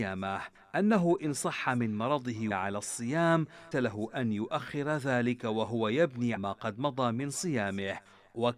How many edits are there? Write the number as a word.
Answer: three